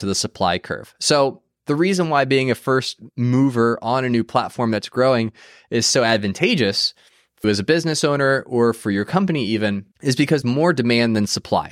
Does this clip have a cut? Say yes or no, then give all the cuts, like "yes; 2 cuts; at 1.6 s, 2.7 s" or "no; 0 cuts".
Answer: yes; 3 cuts; at 7.4 s, 9.9 s, 10.4 s